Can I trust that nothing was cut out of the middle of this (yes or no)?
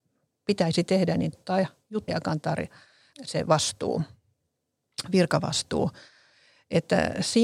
no